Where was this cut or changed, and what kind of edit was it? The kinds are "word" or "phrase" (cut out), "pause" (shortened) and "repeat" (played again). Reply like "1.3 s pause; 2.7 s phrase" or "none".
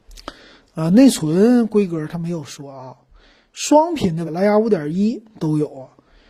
4.3 s word